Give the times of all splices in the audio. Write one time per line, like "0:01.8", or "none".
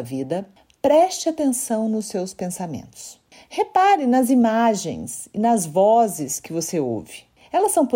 none